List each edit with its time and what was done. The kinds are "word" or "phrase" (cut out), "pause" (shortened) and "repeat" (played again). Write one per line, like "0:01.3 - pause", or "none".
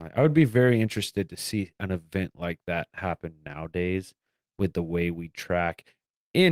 none